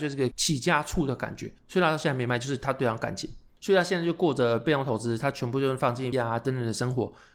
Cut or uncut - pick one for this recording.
cut